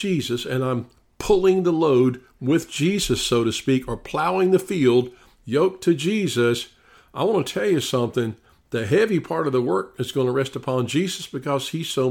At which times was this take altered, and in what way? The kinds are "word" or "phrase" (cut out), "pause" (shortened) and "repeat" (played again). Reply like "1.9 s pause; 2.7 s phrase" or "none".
none